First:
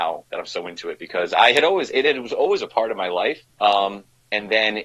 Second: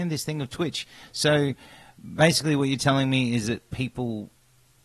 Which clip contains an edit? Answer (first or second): first